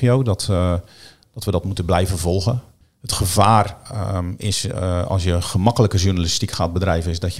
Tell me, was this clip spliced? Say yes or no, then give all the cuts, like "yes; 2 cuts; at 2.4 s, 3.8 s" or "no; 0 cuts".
no; 0 cuts